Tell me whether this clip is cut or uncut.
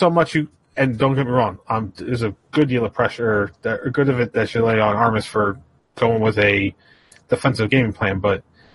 uncut